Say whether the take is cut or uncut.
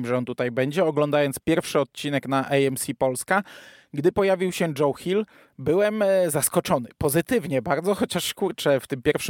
uncut